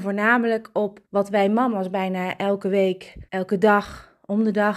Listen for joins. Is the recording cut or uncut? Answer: cut